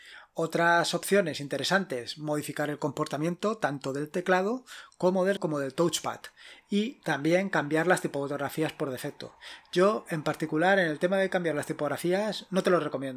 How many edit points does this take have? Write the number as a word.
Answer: one